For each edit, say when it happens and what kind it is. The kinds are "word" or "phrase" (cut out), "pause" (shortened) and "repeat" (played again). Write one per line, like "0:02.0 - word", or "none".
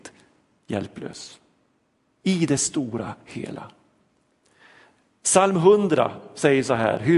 none

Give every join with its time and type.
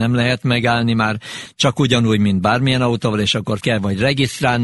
0:03.6 - word

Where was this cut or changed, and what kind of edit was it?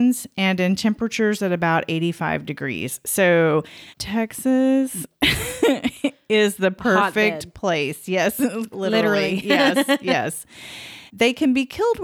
0:03.9 - pause
0:08.7 - word
0:11.1 - pause

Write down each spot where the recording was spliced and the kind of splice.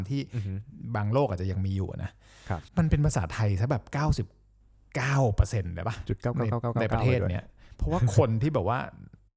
0:02.7 - pause

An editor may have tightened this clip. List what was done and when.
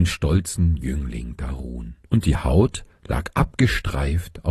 0:02.0 - pause

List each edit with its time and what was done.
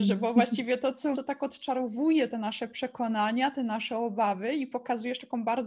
0:01.1 - word
0:02.3 - word

